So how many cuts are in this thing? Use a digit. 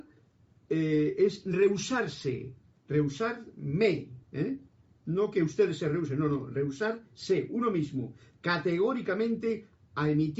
1